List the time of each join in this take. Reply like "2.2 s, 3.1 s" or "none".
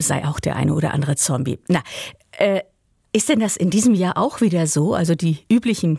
none